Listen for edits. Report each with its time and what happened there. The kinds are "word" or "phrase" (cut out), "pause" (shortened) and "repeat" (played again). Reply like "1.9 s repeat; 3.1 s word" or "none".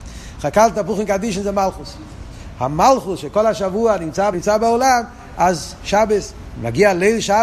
4.3 s word